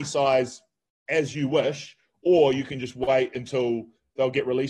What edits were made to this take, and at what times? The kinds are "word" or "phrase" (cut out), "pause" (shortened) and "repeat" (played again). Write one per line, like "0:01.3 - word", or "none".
none